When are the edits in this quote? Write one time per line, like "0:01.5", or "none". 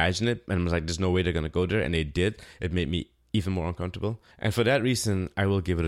0:04.3